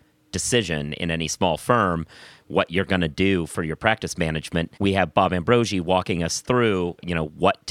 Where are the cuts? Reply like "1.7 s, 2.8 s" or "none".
4.8 s